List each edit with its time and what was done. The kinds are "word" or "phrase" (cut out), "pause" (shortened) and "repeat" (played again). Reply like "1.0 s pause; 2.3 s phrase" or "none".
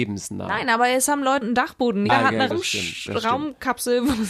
1.4 s phrase; 2.1 s word; 2.5 s word